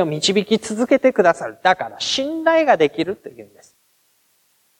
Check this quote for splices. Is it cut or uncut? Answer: uncut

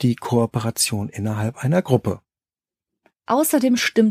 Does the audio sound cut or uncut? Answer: uncut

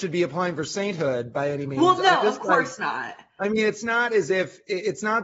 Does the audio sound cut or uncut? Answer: uncut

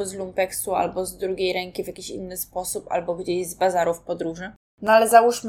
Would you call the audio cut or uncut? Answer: uncut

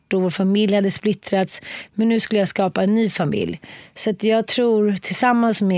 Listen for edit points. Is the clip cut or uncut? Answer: uncut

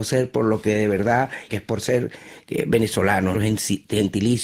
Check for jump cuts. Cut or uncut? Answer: cut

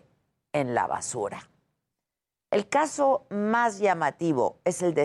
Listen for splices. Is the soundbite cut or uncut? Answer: uncut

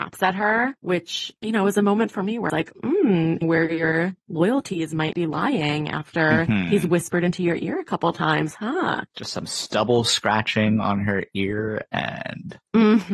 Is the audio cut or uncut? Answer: cut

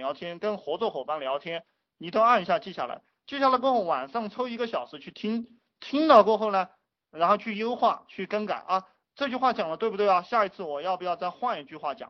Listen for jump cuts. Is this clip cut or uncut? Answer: uncut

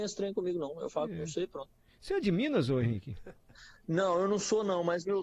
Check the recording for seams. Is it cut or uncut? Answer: uncut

